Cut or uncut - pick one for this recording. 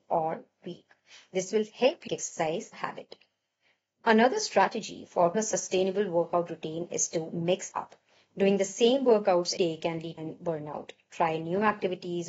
cut